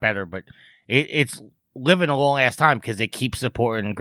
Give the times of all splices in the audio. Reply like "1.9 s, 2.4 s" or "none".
none